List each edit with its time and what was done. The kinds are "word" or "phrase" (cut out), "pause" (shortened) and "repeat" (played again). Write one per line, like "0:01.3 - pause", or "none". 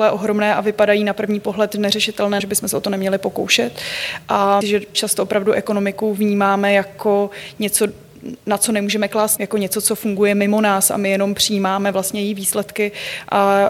0:02.4 - word
0:04.6 - phrase
0:04.9 - word
0:09.4 - word